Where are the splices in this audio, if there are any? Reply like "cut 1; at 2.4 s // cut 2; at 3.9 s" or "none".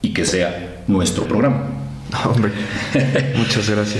cut 1; at 1.3 s